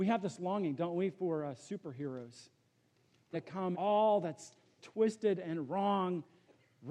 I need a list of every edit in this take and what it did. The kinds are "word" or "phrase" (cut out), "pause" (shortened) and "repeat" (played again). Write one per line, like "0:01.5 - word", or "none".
0:03.3 - word
0:03.7 - phrase
0:04.8 - word